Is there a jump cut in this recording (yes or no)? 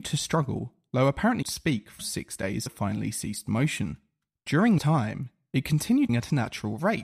yes